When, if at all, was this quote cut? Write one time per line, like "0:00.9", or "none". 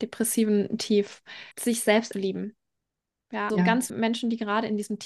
0:01.5
0:02.1
0:03.5
0:03.9